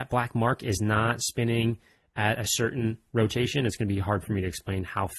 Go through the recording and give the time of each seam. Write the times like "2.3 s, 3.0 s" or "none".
none